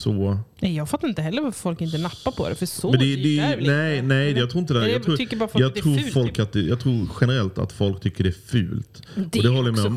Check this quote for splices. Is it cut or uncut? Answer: uncut